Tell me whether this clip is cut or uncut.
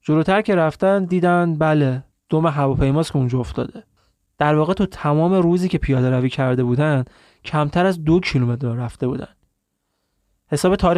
uncut